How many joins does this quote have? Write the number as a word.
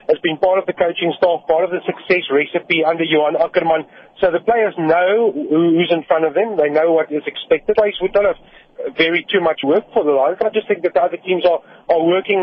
two